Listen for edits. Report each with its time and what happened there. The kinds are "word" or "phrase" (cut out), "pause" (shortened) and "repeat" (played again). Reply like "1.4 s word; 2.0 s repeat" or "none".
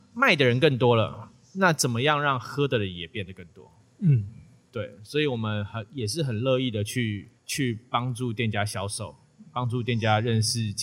7.4 s pause